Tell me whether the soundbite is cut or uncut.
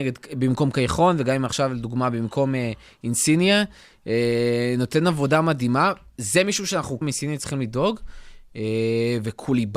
cut